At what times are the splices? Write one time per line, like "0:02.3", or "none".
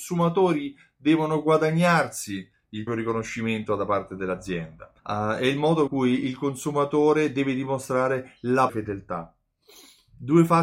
0:02.9
0:05.0
0:05.9
0:08.7